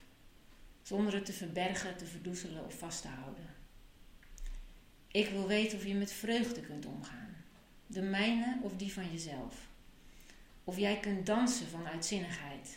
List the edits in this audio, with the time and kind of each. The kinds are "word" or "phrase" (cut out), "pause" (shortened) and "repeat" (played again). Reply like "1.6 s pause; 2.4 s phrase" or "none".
none